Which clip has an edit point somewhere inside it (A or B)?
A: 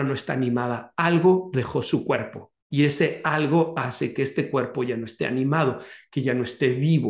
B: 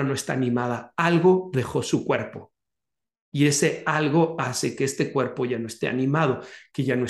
A